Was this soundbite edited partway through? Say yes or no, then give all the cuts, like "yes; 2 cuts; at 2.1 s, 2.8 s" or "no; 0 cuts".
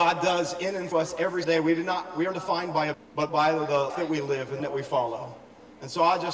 yes; 7 cuts; at 0.9 s, 1.4 s, 2.3 s, 2.9 s, 3.3 s, 3.9 s, 4.6 s